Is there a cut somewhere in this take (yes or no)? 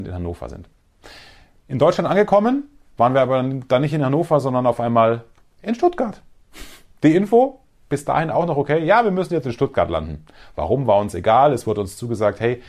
no